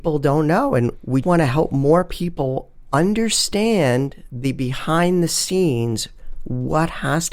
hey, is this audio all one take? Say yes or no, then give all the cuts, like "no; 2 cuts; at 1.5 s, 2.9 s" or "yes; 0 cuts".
no; 1 cut; at 1.2 s